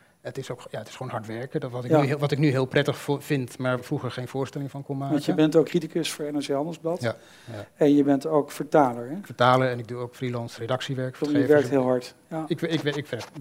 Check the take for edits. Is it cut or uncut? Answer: cut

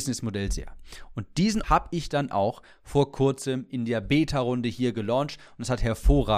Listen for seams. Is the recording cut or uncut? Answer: cut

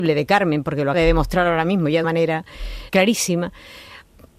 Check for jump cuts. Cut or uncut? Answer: cut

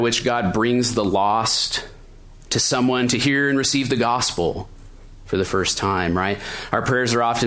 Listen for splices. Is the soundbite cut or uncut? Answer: uncut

